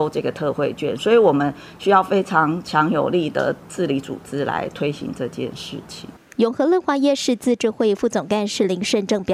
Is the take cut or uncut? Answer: uncut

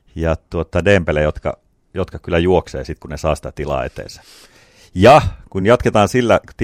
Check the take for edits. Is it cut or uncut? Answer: uncut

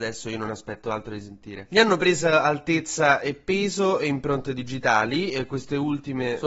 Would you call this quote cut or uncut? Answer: uncut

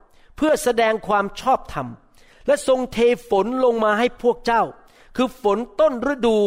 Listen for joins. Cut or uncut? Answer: uncut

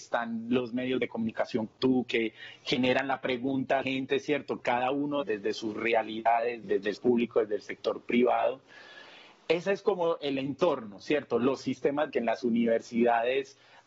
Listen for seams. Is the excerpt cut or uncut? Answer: cut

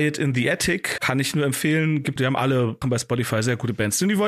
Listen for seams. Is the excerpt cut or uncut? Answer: cut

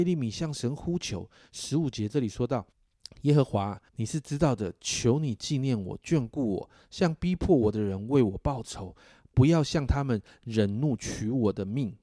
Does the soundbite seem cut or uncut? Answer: cut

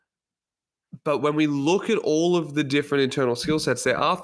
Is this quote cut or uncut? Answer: uncut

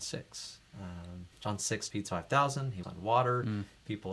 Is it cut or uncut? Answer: cut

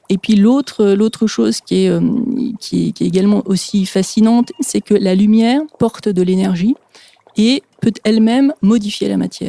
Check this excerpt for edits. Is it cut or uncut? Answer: uncut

